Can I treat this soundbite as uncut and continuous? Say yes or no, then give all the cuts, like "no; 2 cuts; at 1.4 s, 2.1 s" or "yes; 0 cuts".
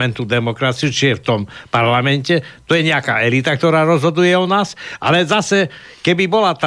yes; 0 cuts